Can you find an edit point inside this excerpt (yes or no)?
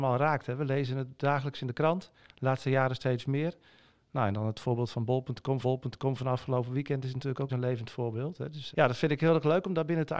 yes